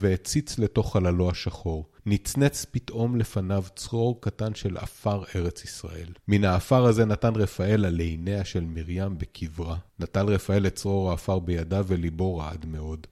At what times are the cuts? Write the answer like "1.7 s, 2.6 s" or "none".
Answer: 2.0 s, 6.2 s, 9.9 s